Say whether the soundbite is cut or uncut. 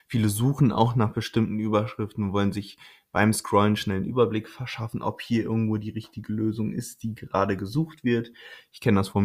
uncut